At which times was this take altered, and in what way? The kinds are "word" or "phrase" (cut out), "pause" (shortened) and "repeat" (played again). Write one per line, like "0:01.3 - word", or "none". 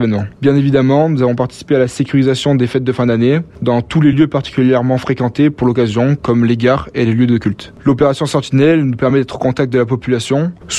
none